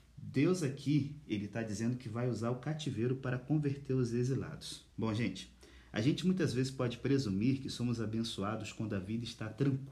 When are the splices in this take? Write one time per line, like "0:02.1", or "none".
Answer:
0:04.9

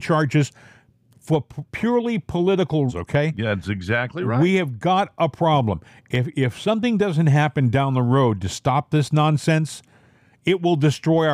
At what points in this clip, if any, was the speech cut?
0:01.7
0:02.9

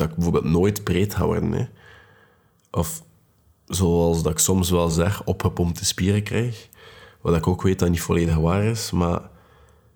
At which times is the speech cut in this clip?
none

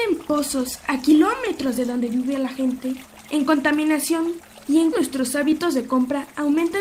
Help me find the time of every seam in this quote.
0:04.9

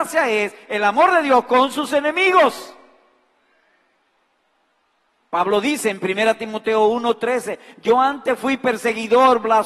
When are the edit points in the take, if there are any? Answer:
none

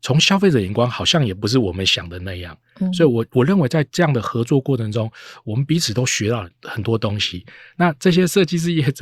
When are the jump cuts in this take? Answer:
none

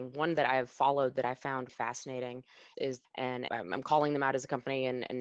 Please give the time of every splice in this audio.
0:01.7
0:02.7
0:03.0
0:03.5

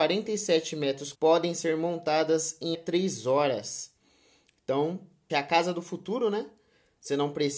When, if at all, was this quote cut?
0:01.1
0:02.7
0:05.3

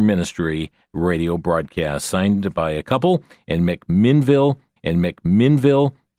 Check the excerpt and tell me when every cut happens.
0:04.8

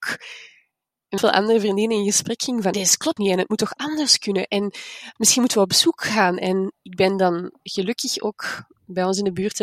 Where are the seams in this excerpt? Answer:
0:01.2
0:02.7
0:03.2
0:05.2

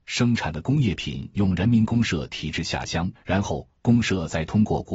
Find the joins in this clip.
0:03.2

